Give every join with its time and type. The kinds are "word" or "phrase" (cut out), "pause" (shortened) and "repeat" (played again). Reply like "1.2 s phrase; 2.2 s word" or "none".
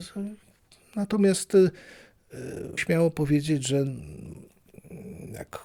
2.8 s word